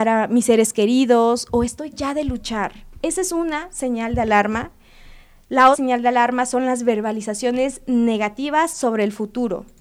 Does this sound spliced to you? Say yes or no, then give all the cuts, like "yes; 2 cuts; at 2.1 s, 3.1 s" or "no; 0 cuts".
yes; 2 cuts; at 1.9 s, 5.7 s